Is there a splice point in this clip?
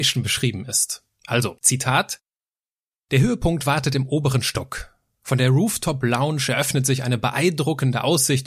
no; 0 cuts

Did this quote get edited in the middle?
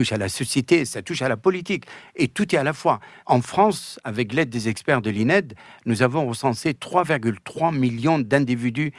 no; 0 cuts

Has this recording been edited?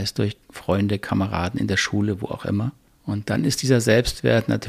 no; 0 cuts

